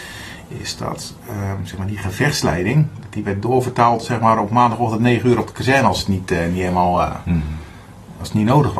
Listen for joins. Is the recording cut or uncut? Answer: uncut